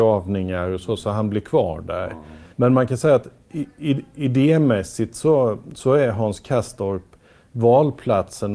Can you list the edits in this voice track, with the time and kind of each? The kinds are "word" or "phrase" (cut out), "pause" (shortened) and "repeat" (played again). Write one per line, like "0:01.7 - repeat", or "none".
0:02.5 - pause